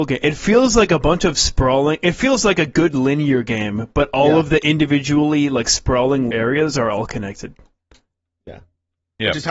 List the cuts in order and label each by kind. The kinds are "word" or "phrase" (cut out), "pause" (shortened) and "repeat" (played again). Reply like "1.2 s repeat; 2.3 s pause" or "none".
6.3 s word